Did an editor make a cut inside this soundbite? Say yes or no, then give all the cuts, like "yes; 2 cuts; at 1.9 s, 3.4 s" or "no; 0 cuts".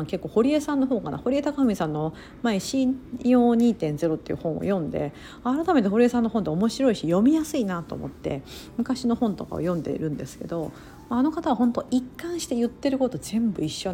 no; 0 cuts